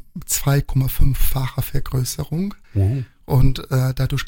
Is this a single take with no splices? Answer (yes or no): no